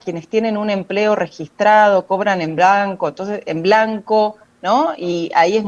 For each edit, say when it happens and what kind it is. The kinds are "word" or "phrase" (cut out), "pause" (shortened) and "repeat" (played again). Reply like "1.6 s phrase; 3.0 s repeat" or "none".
none